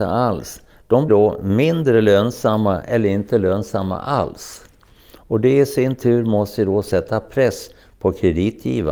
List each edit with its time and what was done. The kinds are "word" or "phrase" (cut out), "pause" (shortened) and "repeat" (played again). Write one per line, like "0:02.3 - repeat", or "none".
0:01.1 - word